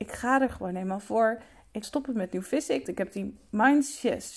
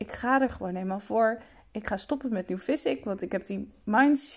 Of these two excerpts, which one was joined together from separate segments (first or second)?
first